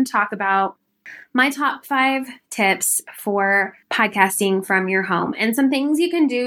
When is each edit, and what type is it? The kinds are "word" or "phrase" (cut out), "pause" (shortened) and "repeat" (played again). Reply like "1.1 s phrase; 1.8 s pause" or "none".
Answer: 3.8 s pause